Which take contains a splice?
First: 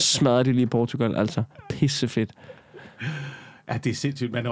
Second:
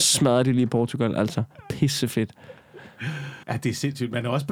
second; 1 cut; at 3.4 s

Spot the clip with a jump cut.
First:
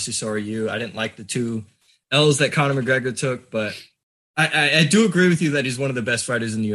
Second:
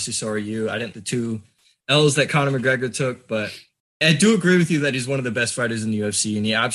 second; 2 cuts; at 0.9 s, 4.0 s

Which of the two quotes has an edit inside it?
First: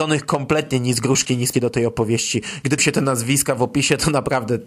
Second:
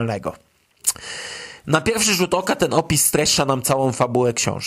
first; 2 cuts; at 1.5 s, 2.8 s

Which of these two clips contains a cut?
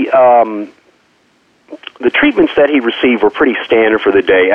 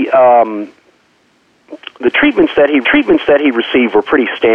second; 1 cut; at 2.8 s

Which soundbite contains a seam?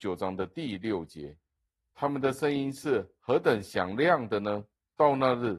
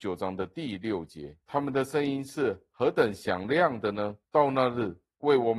second; 2 cuts; at 1.4 s, 4.3 s

